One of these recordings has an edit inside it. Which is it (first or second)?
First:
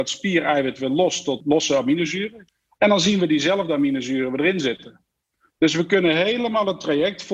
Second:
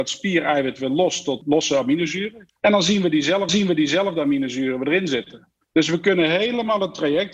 second